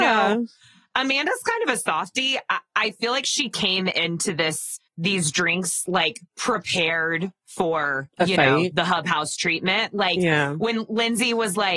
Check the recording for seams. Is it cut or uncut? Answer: cut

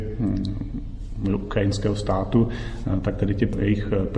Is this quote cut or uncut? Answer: uncut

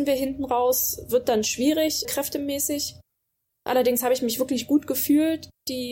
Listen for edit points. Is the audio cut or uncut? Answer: cut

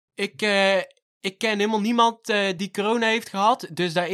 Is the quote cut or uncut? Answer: uncut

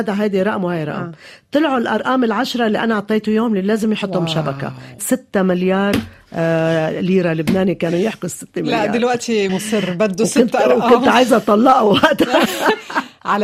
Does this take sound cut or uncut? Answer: cut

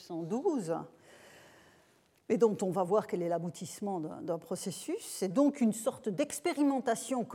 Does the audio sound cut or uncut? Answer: uncut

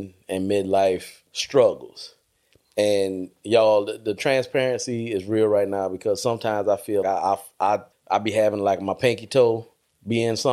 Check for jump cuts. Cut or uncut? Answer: cut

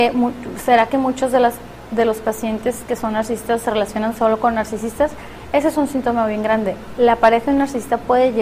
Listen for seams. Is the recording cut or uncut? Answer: uncut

